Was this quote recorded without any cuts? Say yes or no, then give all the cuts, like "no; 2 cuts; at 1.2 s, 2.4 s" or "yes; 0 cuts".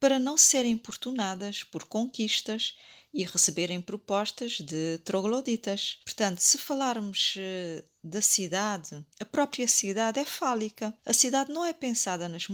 no; 3 cuts; at 6.0 s, 9.1 s, 11.0 s